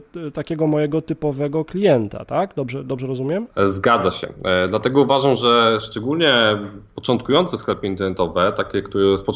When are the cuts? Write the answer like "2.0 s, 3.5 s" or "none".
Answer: 3.5 s